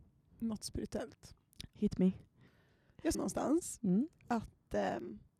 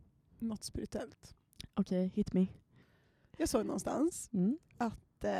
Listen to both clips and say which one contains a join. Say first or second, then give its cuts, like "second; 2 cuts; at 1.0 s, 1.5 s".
first; 2 cuts; at 1.8 s, 3.1 s